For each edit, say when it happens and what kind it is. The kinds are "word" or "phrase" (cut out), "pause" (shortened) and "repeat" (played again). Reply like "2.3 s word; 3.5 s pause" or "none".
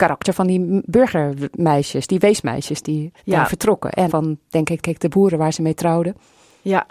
3.2 s pause; 4.1 s phrase; 4.8 s repeat